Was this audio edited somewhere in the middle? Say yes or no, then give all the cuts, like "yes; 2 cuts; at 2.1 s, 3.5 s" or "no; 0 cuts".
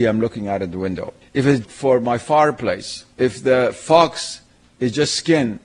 yes; 3 cuts; at 1.2 s, 1.6 s, 3.1 s